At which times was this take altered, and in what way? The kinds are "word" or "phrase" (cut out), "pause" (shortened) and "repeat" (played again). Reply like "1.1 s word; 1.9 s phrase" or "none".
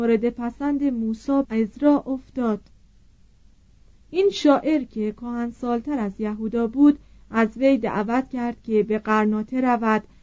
1.4 s word